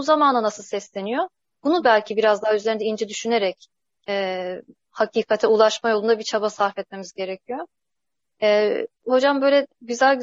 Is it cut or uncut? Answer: uncut